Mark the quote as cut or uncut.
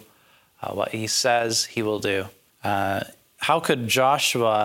cut